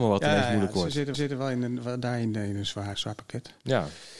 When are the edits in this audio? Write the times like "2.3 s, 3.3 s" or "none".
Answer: 1.1 s, 2.9 s